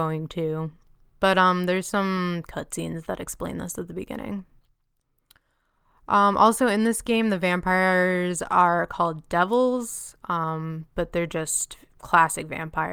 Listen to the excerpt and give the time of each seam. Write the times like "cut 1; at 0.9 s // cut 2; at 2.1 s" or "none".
none